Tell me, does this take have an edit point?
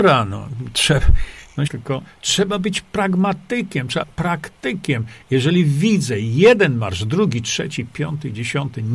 yes; 2 cuts; at 1.7 s, 4.0 s

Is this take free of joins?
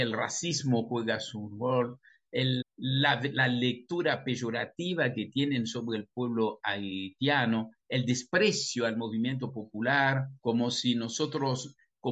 no; 1 cut; at 2.6 s

